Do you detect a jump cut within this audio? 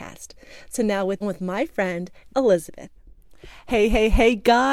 yes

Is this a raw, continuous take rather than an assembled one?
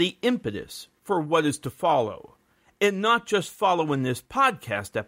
yes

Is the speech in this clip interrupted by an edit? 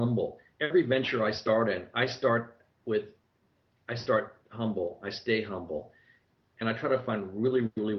no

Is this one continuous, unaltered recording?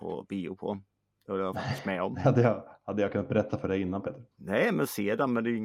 no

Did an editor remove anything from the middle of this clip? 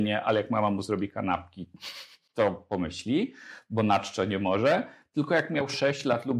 no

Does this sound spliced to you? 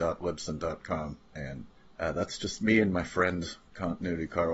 no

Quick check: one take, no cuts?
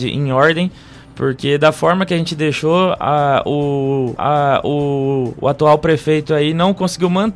no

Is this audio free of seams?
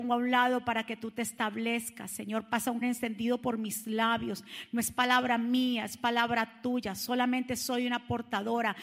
no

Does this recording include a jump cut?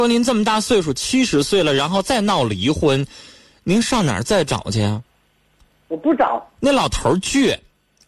no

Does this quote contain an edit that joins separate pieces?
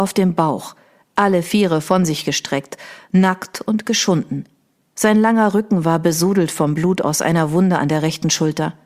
no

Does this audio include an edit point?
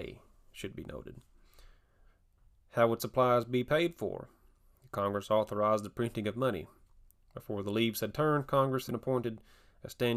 yes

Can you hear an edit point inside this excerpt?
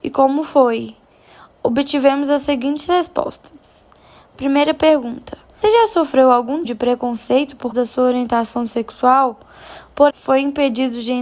yes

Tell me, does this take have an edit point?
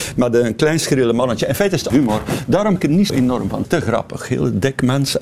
yes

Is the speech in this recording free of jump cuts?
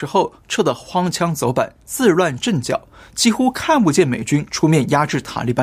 yes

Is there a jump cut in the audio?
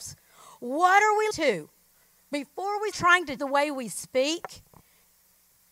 yes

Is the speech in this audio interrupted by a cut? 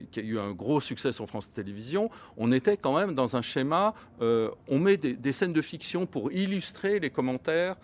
no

